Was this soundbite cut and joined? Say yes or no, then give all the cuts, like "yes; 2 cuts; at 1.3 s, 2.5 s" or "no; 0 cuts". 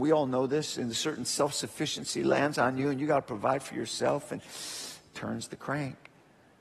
no; 0 cuts